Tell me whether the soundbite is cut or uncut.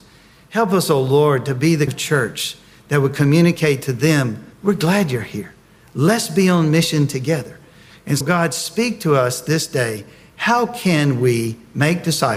cut